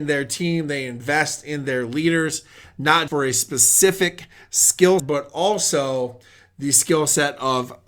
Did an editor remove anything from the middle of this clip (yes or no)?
yes